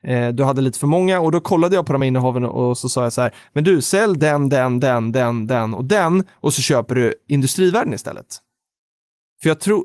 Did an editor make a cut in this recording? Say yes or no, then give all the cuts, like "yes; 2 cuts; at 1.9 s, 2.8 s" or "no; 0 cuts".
no; 0 cuts